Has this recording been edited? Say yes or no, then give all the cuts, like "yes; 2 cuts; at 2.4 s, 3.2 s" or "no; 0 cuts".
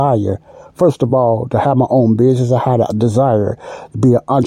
no; 0 cuts